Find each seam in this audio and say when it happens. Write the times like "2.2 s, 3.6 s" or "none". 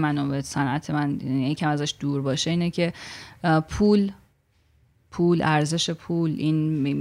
none